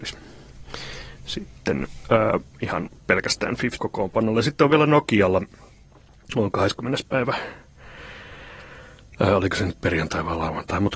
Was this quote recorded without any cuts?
no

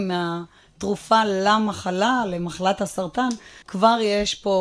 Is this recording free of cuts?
no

